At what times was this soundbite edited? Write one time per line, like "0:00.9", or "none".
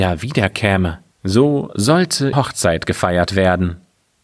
0:01.1
0:02.3